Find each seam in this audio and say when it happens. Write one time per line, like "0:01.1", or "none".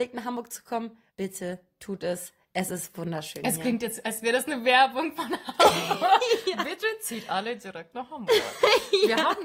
0:01.1